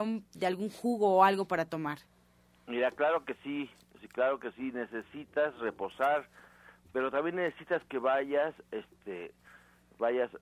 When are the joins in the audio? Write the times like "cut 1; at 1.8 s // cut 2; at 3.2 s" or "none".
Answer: none

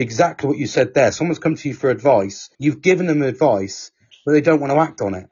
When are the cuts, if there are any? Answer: cut 1; at 2.5 s

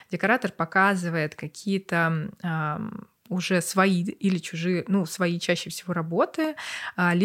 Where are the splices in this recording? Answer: none

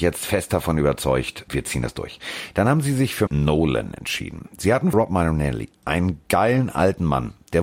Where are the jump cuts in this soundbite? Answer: cut 1; at 1.5 s // cut 2; at 3.3 s // cut 3; at 4.9 s

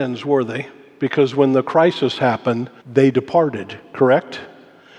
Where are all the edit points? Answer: cut 1; at 2.8 s

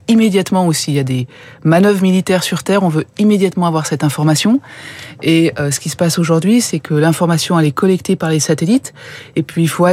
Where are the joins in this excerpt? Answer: none

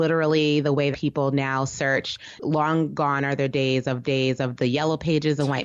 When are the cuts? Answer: cut 1; at 0.9 s // cut 2; at 4.0 s

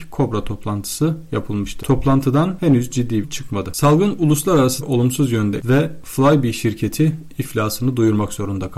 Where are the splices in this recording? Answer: cut 1; at 3.2 s // cut 2; at 4.8 s // cut 3; at 5.6 s

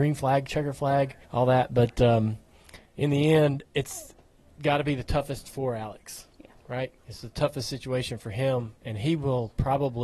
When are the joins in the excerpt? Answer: cut 1; at 1.2 s // cut 2; at 2.9 s // cut 3; at 4.3 s

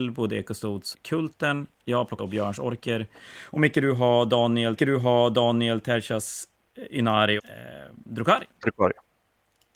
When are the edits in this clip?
cut 1; at 0.9 s // cut 2; at 2.2 s // cut 3; at 4.8 s // cut 4; at 7.4 s // cut 5; at 8.5 s

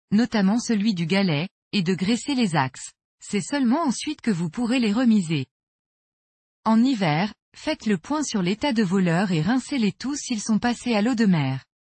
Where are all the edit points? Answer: cut 1; at 3.1 s

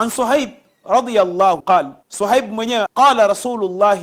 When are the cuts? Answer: cut 1; at 1.6 s // cut 2; at 2.0 s // cut 3; at 2.9 s

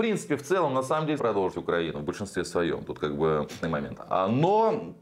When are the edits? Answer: cut 1; at 1.2 s // cut 2; at 1.5 s // cut 3; at 3.6 s

